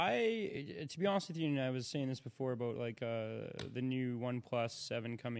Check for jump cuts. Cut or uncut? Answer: uncut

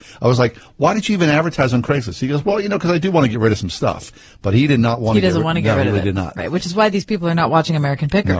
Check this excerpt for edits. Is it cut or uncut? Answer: uncut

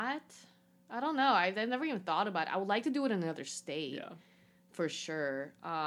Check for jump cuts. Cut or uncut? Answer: uncut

